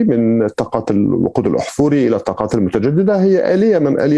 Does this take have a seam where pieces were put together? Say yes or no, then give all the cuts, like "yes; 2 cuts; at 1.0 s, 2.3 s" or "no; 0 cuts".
no; 0 cuts